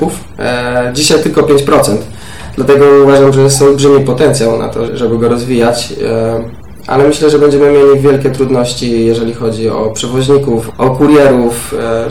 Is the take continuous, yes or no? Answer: no